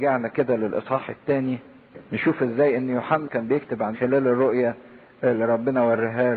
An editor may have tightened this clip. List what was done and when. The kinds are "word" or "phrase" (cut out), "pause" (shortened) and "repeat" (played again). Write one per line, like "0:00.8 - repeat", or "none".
0:03.2 - word
0:03.9 - phrase